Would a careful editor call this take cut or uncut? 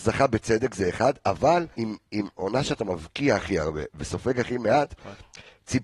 cut